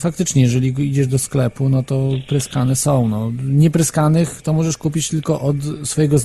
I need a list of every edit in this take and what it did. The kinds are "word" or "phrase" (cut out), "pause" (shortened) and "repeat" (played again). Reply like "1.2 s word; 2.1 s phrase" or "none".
none